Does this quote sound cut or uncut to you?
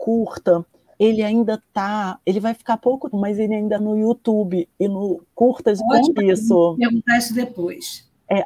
cut